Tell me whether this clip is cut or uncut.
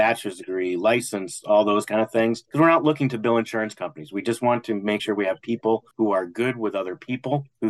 uncut